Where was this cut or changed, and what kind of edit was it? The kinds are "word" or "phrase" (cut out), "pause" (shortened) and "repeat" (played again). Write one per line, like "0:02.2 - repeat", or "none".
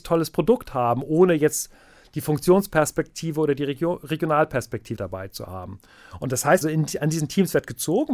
0:05.0 - word
0:06.6 - word